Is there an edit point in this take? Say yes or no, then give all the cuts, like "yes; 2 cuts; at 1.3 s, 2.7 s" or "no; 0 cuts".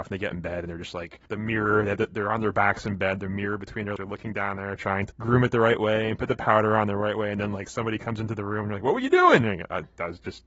yes; 3 cuts; at 1.3 s, 4.0 s, 5.1 s